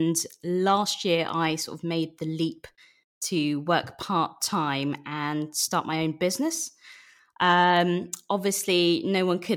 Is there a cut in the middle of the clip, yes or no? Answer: no